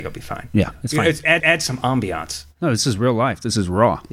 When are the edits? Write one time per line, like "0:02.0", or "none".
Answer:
0:01.4

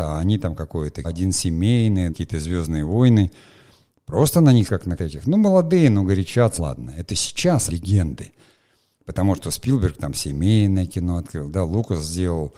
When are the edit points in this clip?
0:01.0
0:02.1
0:04.7
0:05.0
0:06.6
0:07.7

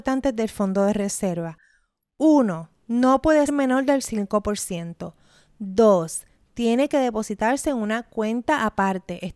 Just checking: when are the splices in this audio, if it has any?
0:03.5

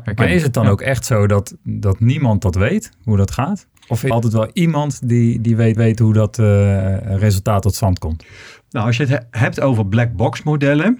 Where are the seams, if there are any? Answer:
0:01.6
0:03.8
0:04.1
0:05.8

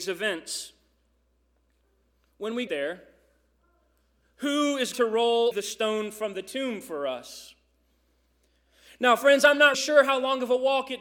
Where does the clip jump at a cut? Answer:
0:02.7
0:04.9
0:05.5
0:09.7

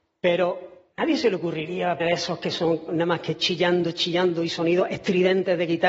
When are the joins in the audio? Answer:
0:00.9
0:02.0
0:02.9
0:03.4

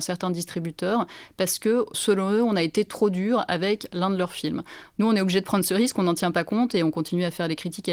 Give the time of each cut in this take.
none

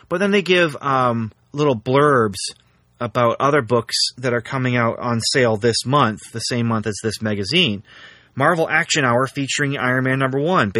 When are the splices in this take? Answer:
0:01.4

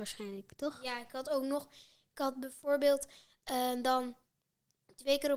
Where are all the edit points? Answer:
none

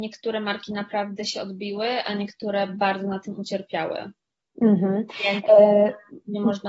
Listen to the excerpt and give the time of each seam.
none

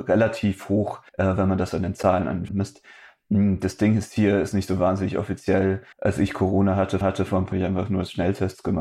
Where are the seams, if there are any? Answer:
0:01.1
0:02.5
0:04.5
0:05.9
0:07.0
0:07.5

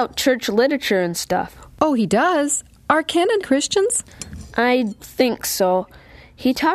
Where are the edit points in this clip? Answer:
0:03.4
0:05.0

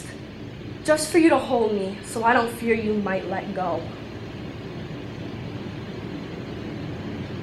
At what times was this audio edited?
none

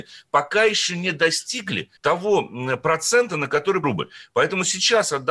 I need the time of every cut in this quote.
0:02.0
0:03.8

